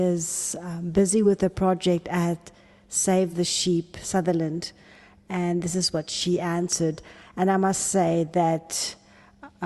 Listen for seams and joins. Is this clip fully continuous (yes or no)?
yes